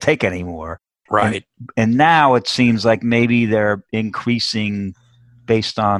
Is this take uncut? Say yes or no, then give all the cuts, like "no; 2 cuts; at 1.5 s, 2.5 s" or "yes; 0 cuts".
yes; 0 cuts